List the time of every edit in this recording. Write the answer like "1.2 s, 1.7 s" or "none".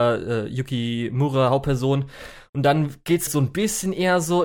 3.3 s